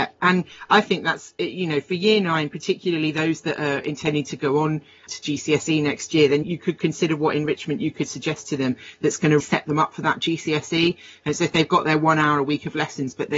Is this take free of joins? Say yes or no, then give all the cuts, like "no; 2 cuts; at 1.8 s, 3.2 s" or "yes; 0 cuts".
no; 3 cuts; at 5.1 s, 6.4 s, 9.4 s